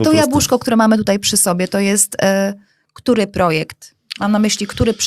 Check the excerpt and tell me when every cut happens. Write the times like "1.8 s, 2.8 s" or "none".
none